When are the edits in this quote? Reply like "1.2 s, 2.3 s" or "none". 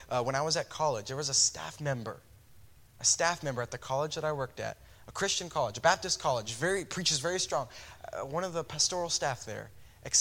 none